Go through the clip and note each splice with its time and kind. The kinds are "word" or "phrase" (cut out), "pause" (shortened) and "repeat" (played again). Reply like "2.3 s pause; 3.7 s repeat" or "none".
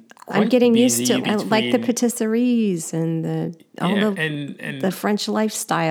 1.2 s word; 4.1 s word